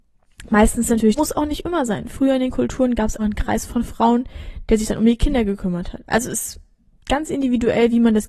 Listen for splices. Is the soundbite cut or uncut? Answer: cut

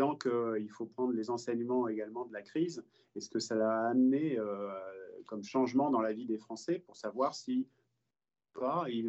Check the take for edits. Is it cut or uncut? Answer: uncut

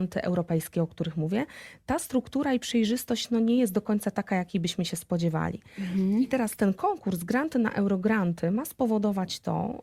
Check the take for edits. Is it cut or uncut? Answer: uncut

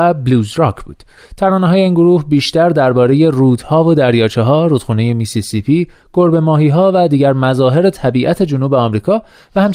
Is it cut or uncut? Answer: uncut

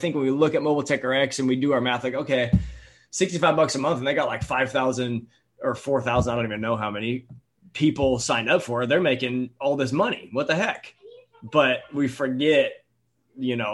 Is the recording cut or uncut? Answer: uncut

